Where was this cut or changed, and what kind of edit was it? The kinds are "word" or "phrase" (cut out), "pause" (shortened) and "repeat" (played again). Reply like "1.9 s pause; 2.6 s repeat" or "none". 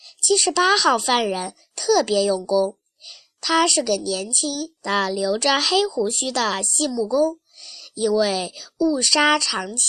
none